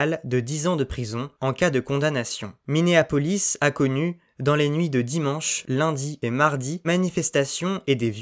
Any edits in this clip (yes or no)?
yes